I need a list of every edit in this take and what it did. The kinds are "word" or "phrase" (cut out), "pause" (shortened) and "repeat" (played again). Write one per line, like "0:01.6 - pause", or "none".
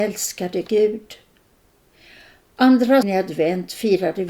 0:03.0 - word